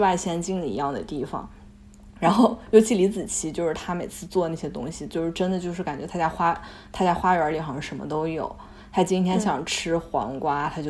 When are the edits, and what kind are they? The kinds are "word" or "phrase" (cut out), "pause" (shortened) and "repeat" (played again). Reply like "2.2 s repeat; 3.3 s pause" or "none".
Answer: none